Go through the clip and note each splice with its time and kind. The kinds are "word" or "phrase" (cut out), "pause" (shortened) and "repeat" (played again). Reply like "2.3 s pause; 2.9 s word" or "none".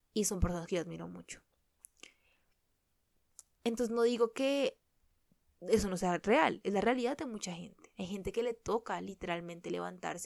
none